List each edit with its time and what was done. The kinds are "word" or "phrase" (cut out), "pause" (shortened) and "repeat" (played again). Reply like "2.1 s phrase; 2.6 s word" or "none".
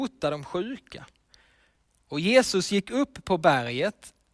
none